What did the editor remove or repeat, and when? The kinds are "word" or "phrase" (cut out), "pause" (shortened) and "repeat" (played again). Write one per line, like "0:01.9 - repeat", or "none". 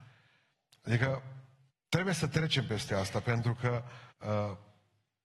0:01.7 - pause
0:04.1 - pause